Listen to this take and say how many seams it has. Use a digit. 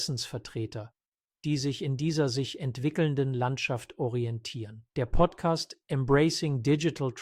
1